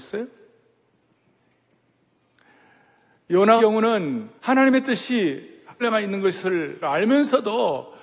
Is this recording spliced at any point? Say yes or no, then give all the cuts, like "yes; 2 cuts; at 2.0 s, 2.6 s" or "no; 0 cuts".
yes; 4 cuts; at 3.6 s, 4.4 s, 5.8 s, 6.8 s